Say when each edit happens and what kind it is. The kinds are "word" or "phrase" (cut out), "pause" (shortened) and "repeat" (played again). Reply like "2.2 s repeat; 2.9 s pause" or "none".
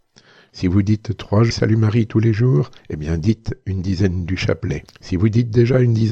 1.5 s word; 2.8 s pause; 4.9 s pause